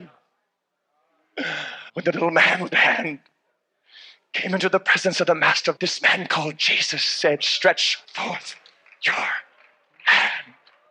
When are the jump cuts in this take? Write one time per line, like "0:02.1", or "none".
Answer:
0:01.9
0:02.7
0:05.8
0:08.0